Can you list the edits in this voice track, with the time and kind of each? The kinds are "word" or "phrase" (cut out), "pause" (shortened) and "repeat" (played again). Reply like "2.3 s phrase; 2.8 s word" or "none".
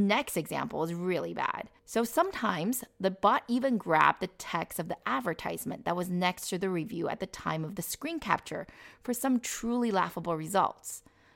1.8 s pause